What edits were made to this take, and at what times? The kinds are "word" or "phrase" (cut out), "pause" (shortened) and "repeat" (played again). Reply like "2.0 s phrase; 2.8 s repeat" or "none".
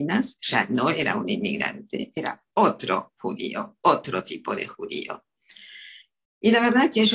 none

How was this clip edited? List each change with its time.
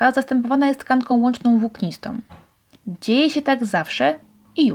none

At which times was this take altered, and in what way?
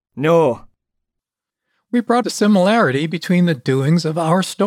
2.2 s word

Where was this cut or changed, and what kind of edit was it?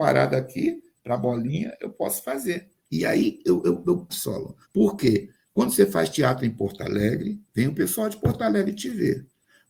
2.8 s pause; 4.1 s phrase; 4.6 s pause; 7.4 s pause

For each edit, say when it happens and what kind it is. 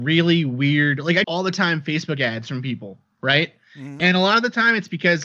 1.2 s phrase

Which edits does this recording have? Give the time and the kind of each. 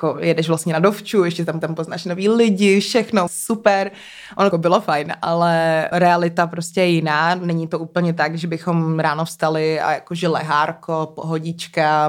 1.6 s repeat; 3.3 s word; 4.5 s word; 5.9 s word

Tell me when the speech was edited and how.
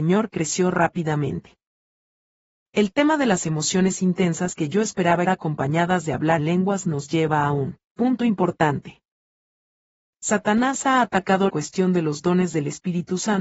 5.3 s word; 6.4 s word; 11.5 s word

